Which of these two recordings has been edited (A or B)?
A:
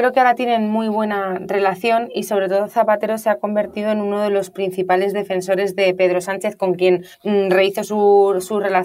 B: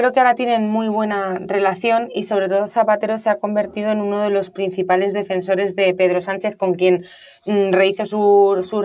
A